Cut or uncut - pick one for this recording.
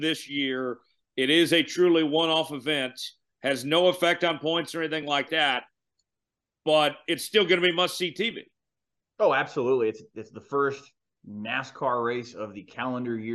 uncut